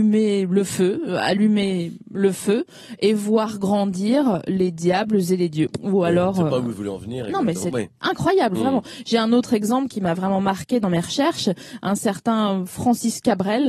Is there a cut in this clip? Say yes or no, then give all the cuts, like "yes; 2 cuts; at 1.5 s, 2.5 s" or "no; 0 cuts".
no; 0 cuts